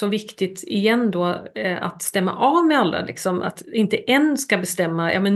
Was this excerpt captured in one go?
yes; 0 cuts

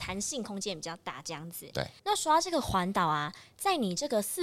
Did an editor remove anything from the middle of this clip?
yes; 1 cut; at 2.0 s

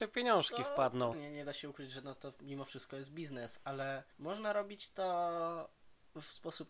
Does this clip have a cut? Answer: yes; 2 cuts; at 1.1 s, 4.1 s

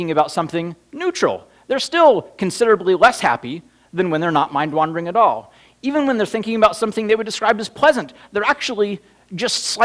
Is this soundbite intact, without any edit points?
yes; 0 cuts

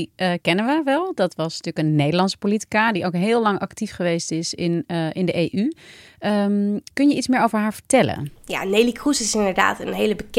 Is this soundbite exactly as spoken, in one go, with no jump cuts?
no; 2 cuts; at 6.9 s, 8.4 s

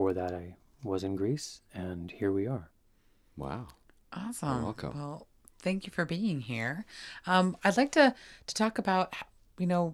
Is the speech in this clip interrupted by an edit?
no; 0 cuts

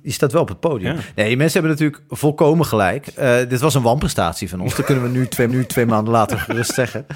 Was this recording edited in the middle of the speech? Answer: yes; 1 cut; at 5.5 s

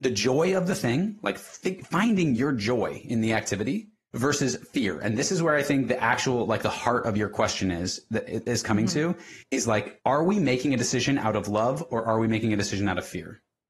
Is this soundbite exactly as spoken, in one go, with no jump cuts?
no; 2 cuts; at 9.4 s, 10.0 s

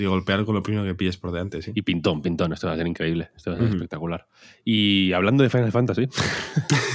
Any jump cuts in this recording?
no; 0 cuts

